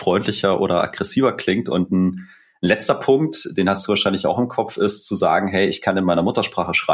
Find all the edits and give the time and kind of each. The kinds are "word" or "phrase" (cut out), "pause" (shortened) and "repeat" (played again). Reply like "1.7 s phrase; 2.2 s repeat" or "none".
none